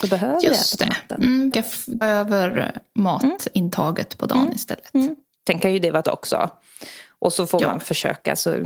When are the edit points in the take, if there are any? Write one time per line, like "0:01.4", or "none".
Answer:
0:01.5
0:02.0
0:06.0